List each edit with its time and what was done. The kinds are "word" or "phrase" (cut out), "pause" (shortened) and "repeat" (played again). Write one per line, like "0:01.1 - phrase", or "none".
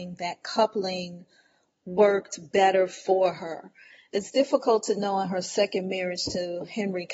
none